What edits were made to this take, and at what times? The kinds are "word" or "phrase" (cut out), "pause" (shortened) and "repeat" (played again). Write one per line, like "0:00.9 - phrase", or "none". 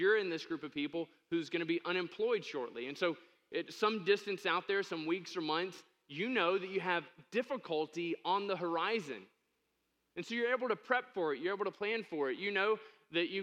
none